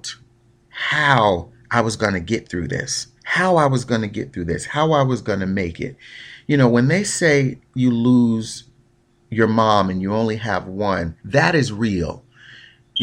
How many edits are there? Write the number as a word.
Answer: two